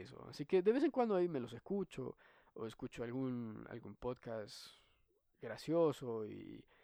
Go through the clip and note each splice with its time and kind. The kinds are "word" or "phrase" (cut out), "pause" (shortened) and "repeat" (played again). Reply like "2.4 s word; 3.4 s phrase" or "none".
none